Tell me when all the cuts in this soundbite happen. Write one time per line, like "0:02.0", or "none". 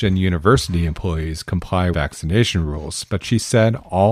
0:01.9